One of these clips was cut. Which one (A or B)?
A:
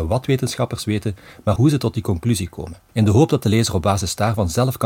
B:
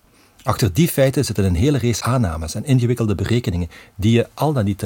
A